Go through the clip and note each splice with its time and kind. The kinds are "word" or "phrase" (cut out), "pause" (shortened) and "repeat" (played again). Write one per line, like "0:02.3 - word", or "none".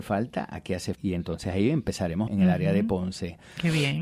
0:00.9 - word
0:02.3 - phrase

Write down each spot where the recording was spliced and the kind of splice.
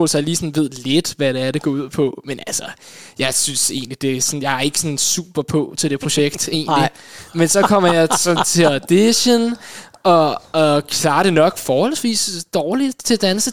none

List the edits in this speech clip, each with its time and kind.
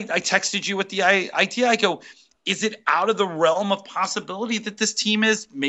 none

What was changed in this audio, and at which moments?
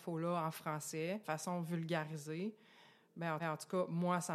0:01.2 - word
0:03.4 - repeat

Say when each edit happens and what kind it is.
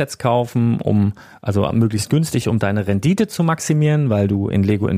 none

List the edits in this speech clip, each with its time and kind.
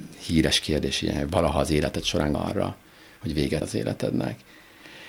0:02.3 - word
0:03.6 - word

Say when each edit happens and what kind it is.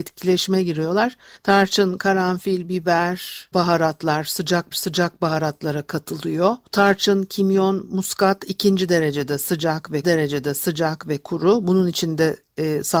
0:01.4 - pause
0:03.5 - word
0:04.7 - repeat
0:06.7 - pause
0:10.0 - repeat

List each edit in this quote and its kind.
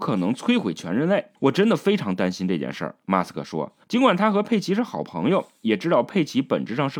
0:01.4 - pause
0:03.8 - pause

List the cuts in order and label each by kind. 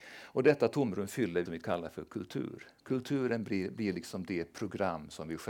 0:01.5 - phrase

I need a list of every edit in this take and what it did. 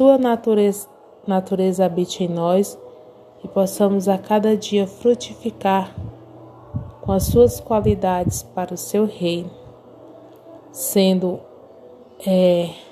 none

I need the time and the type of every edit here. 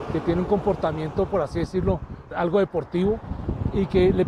0:02.3 - word

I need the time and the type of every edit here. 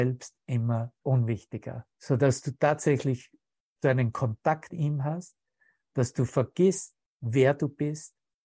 0:01.0 - word
0:01.9 - pause
0:03.8 - phrase
0:04.7 - word

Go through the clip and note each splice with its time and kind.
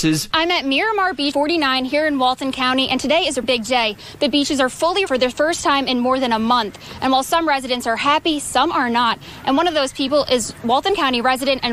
0:01.3 - word
0:03.4 - word
0:05.1 - word

